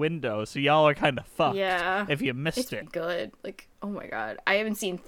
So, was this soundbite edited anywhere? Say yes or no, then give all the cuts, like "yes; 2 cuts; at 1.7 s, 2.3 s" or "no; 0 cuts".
yes; 2 cuts; at 2.8 s, 3.7 s